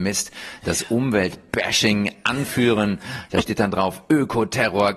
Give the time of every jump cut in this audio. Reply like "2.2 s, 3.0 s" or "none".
none